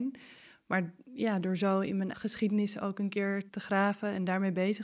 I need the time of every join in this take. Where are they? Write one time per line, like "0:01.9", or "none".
0:02.1
0:03.5